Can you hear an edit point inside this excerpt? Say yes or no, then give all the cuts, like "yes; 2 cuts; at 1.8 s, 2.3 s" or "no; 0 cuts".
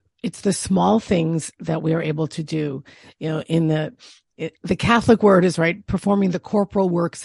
no; 0 cuts